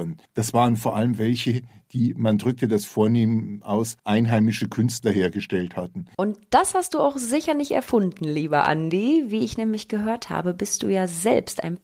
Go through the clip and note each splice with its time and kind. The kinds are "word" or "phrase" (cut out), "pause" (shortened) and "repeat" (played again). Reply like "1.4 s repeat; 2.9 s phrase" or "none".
4.0 s pause